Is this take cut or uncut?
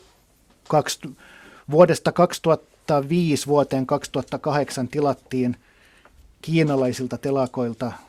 uncut